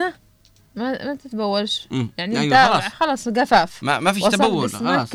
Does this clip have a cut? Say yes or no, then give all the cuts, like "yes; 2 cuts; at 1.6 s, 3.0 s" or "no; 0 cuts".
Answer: no; 0 cuts